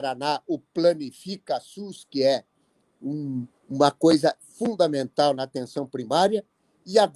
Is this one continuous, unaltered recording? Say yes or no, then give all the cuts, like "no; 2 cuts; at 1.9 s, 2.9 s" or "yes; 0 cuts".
yes; 0 cuts